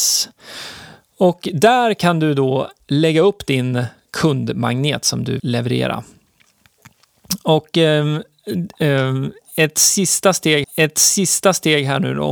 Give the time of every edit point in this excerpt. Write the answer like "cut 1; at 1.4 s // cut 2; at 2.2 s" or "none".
cut 1; at 4.1 s // cut 2; at 5.4 s // cut 3; at 10.6 s